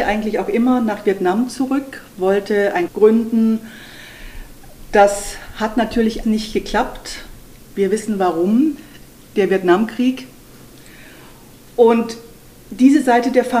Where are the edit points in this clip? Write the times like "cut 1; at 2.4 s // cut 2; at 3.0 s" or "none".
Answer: cut 1; at 2.9 s // cut 2; at 6.2 s // cut 3; at 9.1 s